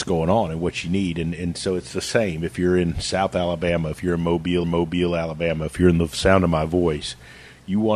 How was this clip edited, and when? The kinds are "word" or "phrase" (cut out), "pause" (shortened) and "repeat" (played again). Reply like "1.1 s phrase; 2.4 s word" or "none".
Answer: 4.6 s repeat